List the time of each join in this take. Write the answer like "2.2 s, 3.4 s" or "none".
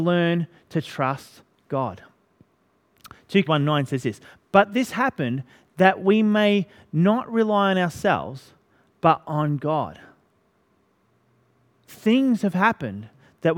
3.4 s